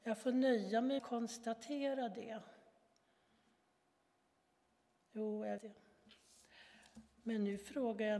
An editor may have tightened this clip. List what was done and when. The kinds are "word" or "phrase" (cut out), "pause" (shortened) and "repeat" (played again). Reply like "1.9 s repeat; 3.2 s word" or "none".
1.0 s phrase; 5.6 s word